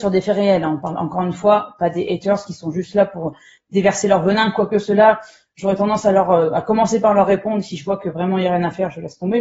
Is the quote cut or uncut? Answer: uncut